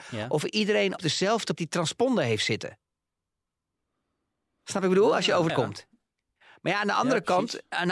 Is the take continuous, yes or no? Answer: no